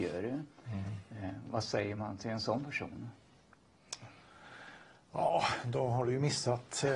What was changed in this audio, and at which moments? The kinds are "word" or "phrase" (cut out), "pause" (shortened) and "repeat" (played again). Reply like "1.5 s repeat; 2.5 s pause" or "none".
none